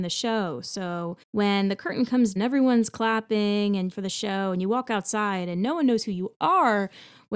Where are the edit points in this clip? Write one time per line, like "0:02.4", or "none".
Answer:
0:01.2
0:02.4
0:03.9